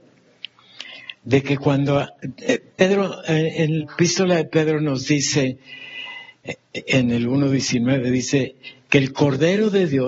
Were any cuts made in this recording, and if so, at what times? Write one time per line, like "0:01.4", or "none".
0:03.8

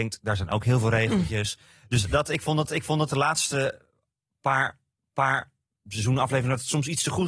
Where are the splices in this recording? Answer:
0:02.7
0:05.0

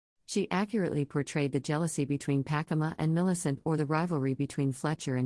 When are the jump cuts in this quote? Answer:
none

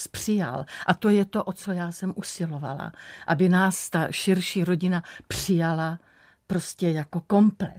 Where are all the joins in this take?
none

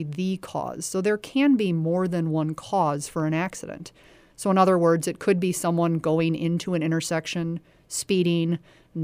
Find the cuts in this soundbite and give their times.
none

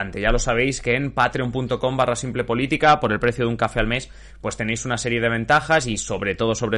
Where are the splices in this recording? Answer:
none

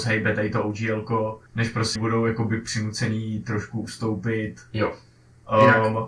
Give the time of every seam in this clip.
0:01.5
0:02.0

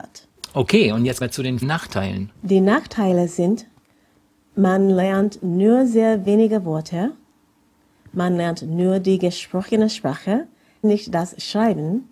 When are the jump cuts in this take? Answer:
0:01.2
0:01.6
0:10.8

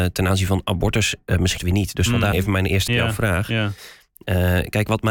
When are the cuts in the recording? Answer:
0:01.6
0:02.3
0:02.9

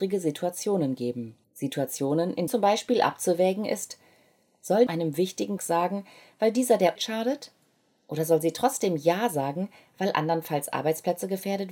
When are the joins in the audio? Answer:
0:01.4
0:02.5
0:04.9
0:05.6
0:07.0

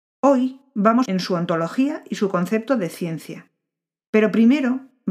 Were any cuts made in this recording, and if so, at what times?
0:01.0

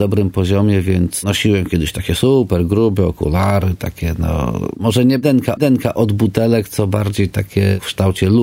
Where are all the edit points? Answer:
0:05.6

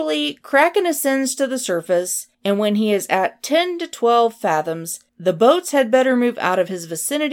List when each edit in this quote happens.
0:02.3
0:05.1

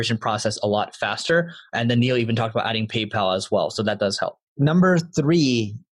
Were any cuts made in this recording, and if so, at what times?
0:04.5

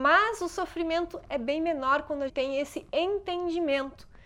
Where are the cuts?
0:02.3

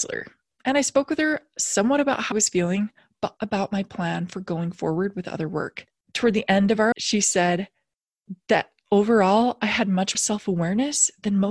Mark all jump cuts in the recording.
0:02.3
0:03.4
0:06.9
0:10.1

